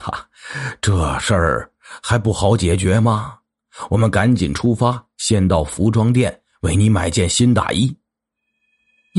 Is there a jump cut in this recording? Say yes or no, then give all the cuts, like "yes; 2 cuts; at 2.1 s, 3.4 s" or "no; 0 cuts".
no; 0 cuts